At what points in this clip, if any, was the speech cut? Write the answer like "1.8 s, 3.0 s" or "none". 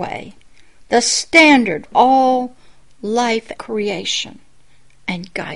1.8 s, 3.6 s